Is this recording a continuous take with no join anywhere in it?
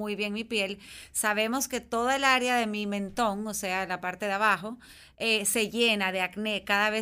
yes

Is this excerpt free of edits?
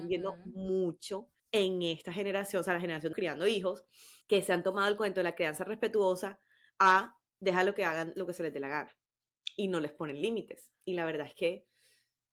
no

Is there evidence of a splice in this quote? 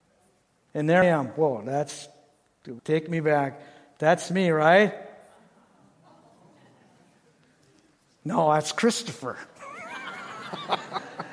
yes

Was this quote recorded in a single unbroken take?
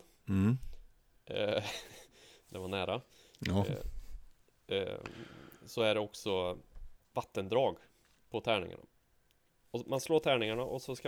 no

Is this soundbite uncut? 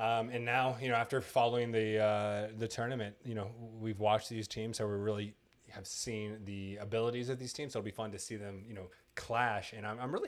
yes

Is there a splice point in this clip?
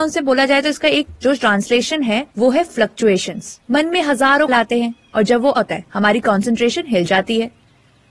yes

